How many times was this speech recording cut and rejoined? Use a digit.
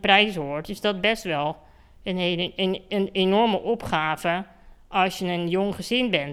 0